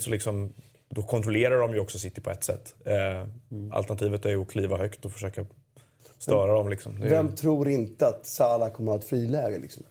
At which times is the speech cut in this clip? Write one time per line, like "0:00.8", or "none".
none